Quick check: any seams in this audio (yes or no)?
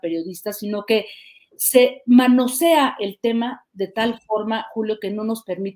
no